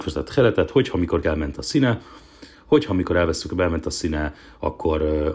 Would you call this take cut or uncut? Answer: cut